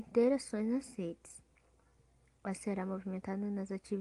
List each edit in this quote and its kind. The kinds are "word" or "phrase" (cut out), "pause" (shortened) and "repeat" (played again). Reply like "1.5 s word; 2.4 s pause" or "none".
2.6 s word